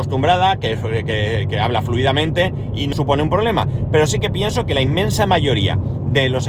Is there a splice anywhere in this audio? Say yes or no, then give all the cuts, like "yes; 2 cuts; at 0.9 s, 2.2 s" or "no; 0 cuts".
yes; 1 cut; at 2.9 s